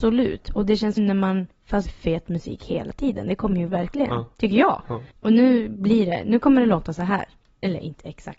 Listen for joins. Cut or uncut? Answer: cut